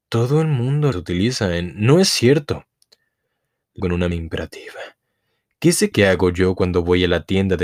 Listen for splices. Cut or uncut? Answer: cut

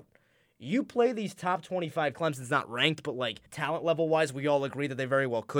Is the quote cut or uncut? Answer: cut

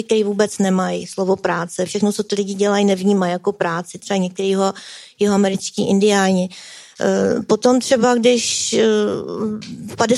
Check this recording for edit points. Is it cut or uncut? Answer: uncut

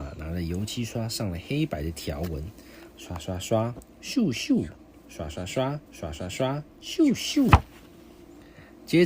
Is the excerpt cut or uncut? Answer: cut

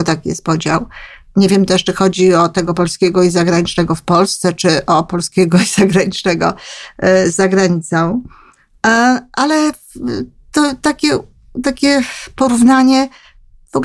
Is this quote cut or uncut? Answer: uncut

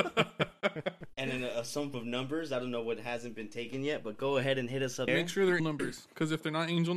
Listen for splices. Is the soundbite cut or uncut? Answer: cut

